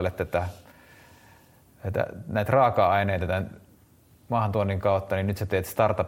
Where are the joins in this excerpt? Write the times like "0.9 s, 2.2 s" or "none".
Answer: none